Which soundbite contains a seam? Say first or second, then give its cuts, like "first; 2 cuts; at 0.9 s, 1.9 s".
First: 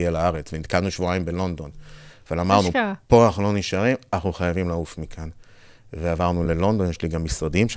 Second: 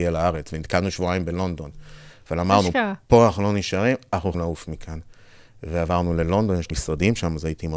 second; 2 cuts; at 4.3 s, 6.7 s